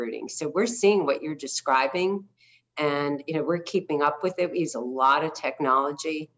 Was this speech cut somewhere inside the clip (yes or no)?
no